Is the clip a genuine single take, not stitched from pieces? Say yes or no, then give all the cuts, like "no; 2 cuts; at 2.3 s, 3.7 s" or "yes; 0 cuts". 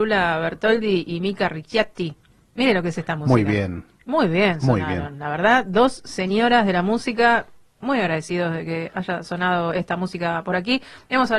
yes; 0 cuts